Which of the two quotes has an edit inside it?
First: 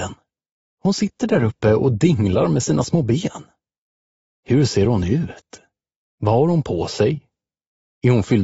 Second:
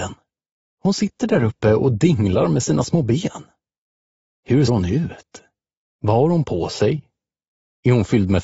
second; 1 cut; at 4.7 s

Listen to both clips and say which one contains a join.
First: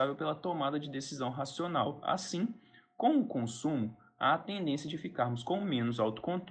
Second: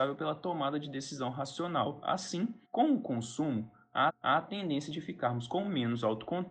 second; 2 cuts; at 2.6 s, 4.1 s

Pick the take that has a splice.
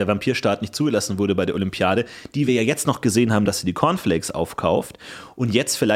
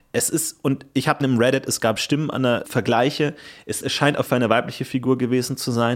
second; 4 cuts; at 1.2 s, 2.6 s, 3.8 s, 4.3 s

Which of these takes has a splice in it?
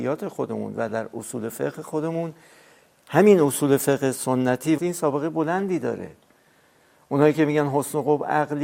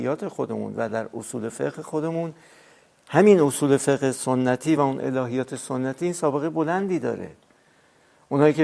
first; 1 cut; at 4.8 s

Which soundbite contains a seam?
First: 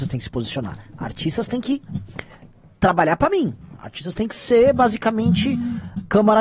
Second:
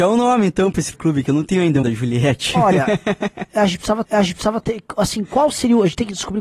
second; 3 cuts; at 0.9 s, 1.8 s, 4.0 s

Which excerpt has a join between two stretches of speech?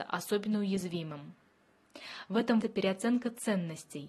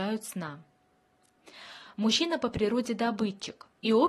first; 1 cut; at 2.6 s

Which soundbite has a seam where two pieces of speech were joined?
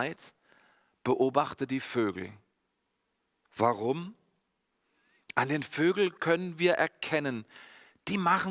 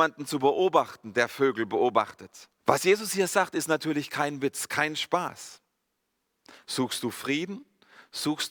second; 1 cut; at 2.6 s

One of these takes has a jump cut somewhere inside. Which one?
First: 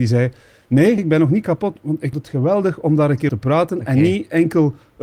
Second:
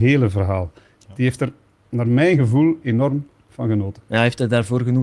first; 3 cuts; at 1.0 s, 2.1 s, 3.3 s

